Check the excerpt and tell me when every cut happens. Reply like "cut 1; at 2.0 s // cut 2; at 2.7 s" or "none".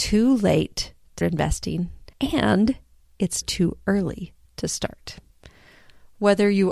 cut 1; at 1.2 s // cut 2; at 2.1 s // cut 3; at 3.4 s